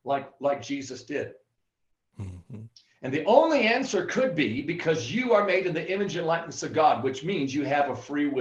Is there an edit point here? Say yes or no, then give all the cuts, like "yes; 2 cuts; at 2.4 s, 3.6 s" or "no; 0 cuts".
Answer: no; 0 cuts